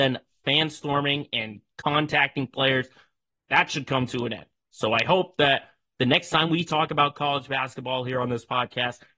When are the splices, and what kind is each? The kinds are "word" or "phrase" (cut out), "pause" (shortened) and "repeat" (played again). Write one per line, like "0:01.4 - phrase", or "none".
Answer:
none

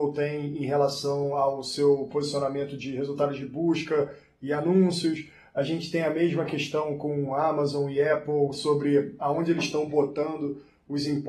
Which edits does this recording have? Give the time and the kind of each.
none

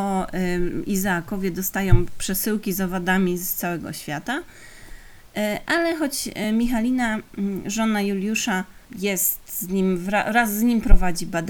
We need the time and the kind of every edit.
none

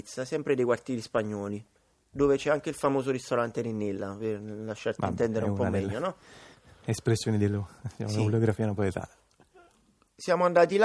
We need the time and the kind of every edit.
none

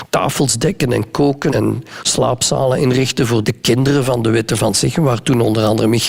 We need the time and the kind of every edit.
0:01.5 - word
0:03.4 - word

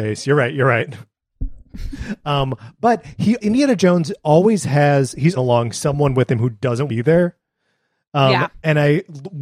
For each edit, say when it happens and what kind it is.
0:03.4 - word
0:05.4 - phrase
0:06.9 - phrase

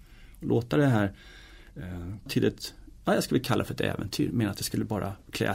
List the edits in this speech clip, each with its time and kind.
0:02.3 - word

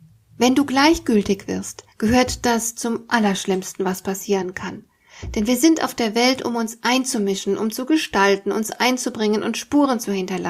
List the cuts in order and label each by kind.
0:01.9 - pause

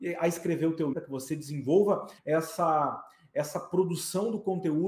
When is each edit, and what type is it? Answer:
0:00.9 - word
0:02.2 - pause

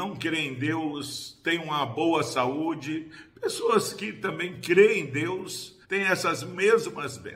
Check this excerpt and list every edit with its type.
0:05.8 - pause

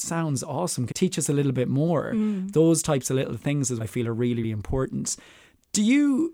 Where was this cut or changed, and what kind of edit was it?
0:00.9 - word
0:03.8 - word
0:04.4 - word

